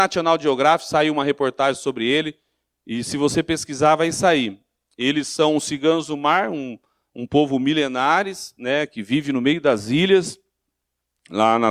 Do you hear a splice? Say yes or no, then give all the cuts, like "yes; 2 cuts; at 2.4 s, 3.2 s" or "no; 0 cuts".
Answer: no; 0 cuts